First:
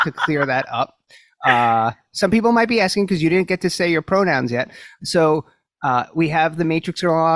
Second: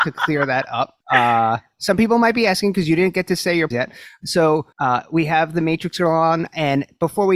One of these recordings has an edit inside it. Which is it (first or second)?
second